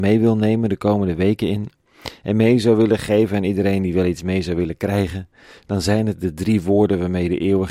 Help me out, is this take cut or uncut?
uncut